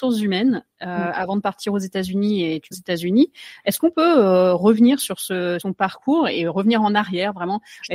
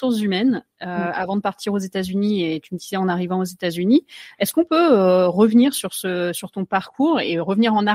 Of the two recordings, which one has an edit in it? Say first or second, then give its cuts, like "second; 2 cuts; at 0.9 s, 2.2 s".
first; 2 cuts; at 2.7 s, 5.6 s